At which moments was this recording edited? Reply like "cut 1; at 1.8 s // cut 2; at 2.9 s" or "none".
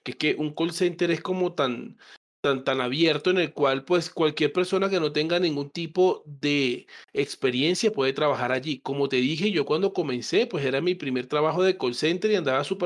none